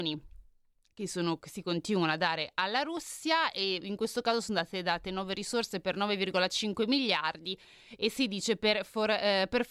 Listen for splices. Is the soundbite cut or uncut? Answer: uncut